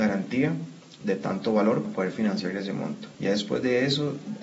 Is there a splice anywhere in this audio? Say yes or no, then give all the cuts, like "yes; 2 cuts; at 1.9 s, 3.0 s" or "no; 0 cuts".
yes; 2 cuts; at 1.8 s, 3.1 s